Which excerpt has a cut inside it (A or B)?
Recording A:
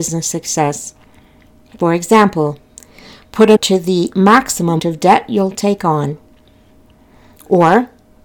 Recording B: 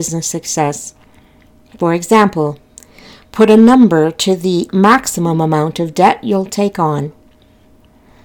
A